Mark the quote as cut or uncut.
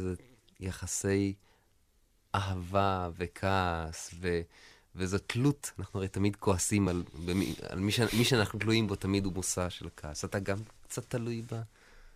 uncut